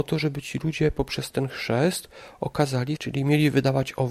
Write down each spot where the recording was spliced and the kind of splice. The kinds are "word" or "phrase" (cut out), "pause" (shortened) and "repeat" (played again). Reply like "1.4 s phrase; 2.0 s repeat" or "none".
3.0 s word